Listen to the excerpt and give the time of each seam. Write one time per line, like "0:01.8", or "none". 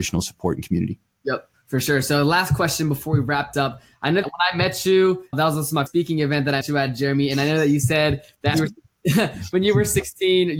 0:03.5
0:04.2
0:05.3
0:05.9
0:06.6
0:08.5